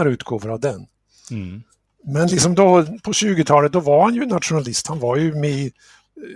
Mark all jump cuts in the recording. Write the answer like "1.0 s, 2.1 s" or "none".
none

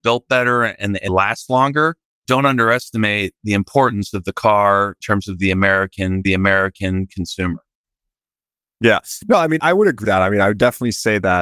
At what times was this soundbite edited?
1.1 s, 2.3 s, 5.0 s, 6.3 s, 9.6 s, 10.0 s

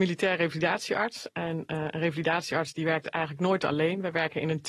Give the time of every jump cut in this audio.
none

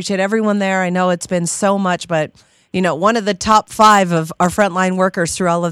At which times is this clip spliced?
none

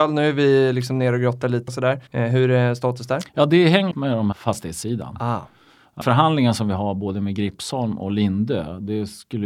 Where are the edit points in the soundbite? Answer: 1.7 s, 2.1 s, 3.3 s, 3.9 s, 4.3 s, 6.0 s

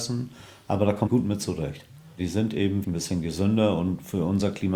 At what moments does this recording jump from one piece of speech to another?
1.1 s, 2.8 s

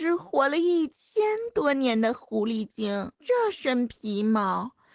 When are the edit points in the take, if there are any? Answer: 3.1 s

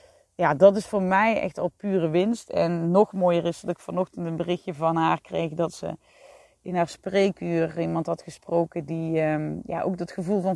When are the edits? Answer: none

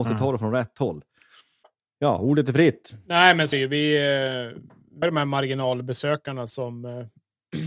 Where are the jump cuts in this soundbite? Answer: 1.6 s, 3.5 s, 5.0 s

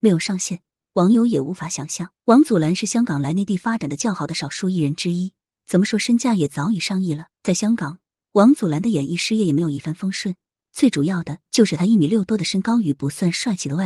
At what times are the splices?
2.2 s, 7.3 s

